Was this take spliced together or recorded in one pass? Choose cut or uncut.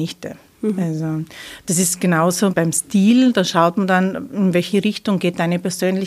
cut